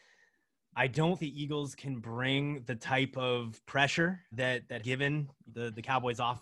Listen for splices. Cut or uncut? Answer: cut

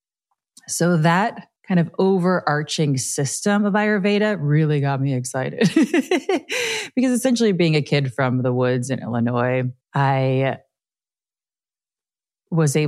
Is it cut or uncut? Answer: cut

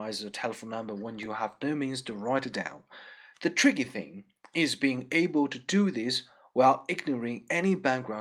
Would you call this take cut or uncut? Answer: uncut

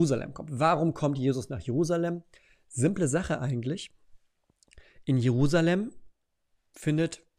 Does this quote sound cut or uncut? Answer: uncut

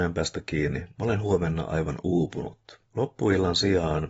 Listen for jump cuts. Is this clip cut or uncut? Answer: cut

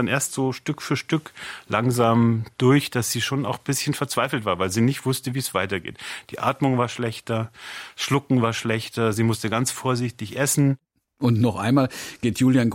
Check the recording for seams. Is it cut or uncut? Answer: uncut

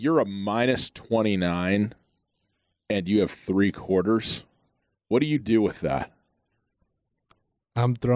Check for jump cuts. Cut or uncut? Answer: uncut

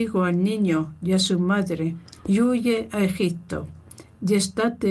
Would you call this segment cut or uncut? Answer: cut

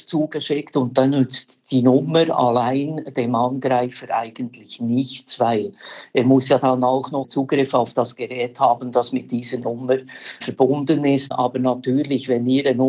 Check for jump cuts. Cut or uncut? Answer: uncut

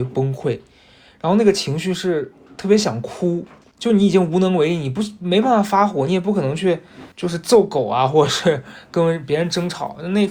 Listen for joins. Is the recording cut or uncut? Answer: cut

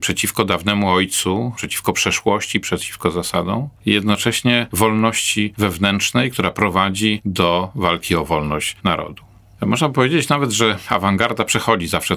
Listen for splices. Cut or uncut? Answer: uncut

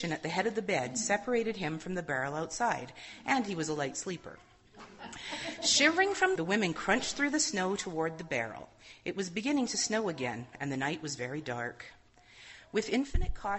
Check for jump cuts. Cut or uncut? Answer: cut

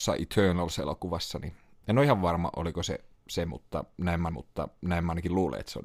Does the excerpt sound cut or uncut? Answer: cut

